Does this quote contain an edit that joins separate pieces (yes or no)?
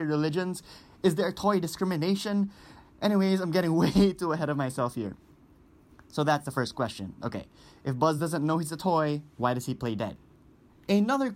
no